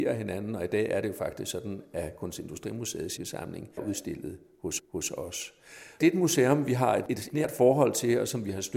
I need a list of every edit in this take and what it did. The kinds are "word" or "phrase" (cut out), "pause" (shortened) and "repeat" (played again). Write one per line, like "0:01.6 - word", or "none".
0:03.2 - word
0:03.8 - word
0:04.8 - repeat